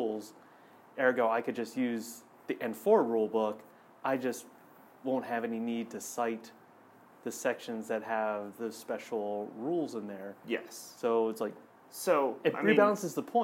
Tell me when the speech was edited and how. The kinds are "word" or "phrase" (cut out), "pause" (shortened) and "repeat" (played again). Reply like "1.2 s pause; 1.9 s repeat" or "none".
none